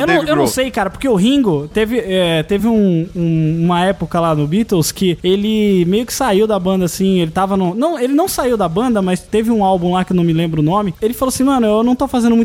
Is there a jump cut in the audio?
no; 0 cuts

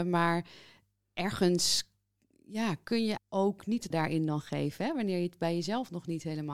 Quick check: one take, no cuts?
no; 2 cuts; at 3.2 s, 3.9 s

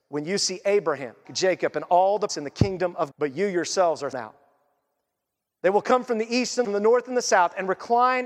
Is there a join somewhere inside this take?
yes; 5 cuts; at 1.3 s, 2.3 s, 3.1 s, 4.1 s, 6.6 s

